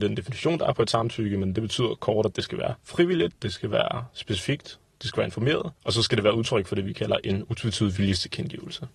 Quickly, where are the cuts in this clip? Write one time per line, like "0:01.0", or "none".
0:02.8
0:05.8